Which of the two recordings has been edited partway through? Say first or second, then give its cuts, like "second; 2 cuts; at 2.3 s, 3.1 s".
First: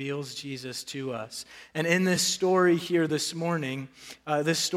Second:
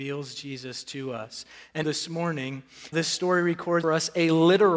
second; 3 cuts; at 1.8 s, 2.9 s, 3.8 s